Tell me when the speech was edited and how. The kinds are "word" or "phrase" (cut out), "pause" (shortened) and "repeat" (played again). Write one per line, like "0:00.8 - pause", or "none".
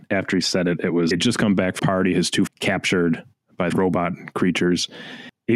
0:01.1 - phrase
0:01.8 - word
0:02.5 - phrase
0:03.7 - word